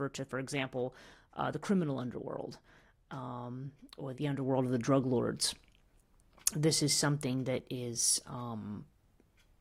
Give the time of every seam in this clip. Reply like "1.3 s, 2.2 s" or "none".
4.1 s